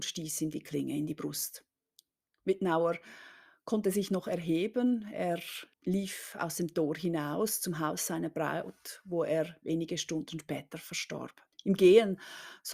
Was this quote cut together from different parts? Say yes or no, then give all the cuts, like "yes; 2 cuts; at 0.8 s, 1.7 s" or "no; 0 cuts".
yes; 3 cuts; at 2.0 s, 5.7 s, 11.5 s